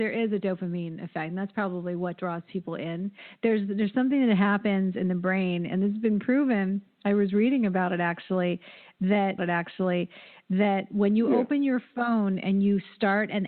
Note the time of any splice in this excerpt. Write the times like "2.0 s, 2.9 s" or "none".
9.4 s